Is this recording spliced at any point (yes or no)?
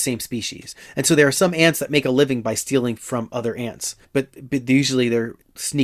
yes